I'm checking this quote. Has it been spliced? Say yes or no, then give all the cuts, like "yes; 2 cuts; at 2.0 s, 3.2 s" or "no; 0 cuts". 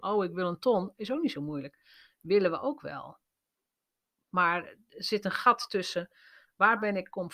no; 0 cuts